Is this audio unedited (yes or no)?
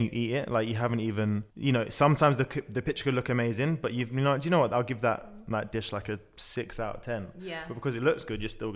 no